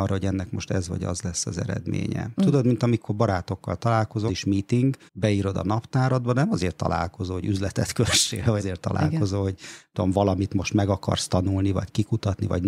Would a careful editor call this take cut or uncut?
cut